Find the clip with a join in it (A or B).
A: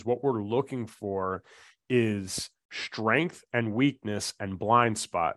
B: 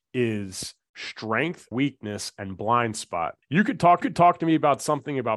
B